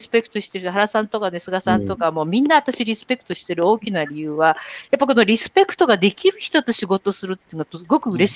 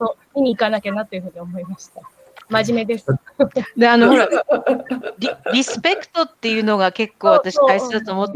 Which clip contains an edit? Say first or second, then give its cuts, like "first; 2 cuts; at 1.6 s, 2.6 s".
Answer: second; 1 cut; at 6.3 s